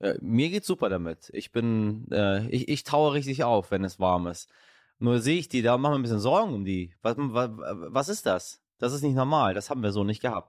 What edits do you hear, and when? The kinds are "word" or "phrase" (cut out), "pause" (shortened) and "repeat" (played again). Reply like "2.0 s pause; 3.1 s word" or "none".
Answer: 7.2 s word